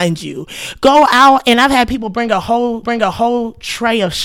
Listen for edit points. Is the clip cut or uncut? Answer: cut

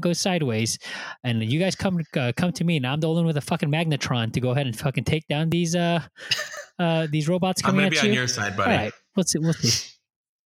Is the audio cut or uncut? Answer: uncut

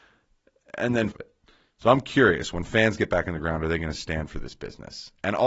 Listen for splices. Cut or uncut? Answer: cut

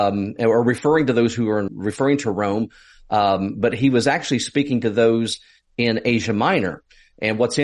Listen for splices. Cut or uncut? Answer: cut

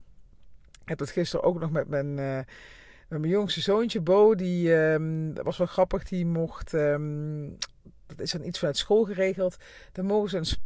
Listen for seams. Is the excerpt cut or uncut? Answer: uncut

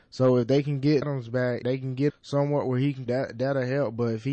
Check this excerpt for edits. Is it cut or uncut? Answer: cut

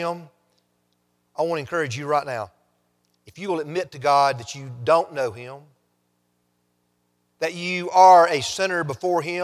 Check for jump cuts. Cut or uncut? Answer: uncut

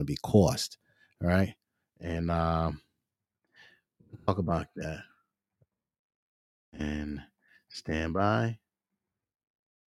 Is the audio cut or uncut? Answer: uncut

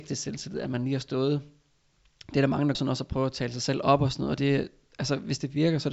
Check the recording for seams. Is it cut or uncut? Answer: cut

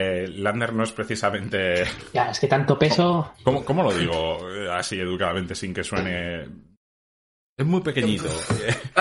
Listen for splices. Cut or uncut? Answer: uncut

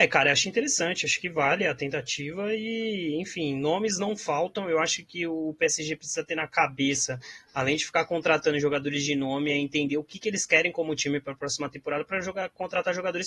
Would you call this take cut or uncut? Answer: uncut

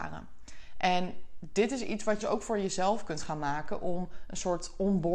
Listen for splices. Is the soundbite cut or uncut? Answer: cut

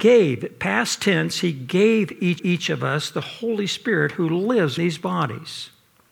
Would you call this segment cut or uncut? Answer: cut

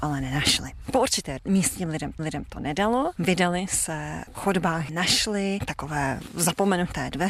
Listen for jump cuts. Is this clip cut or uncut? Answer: cut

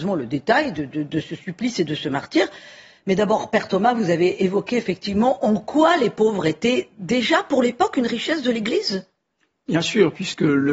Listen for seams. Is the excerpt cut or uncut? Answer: uncut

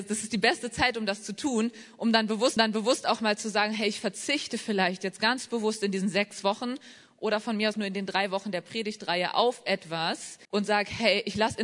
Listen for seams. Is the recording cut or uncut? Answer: cut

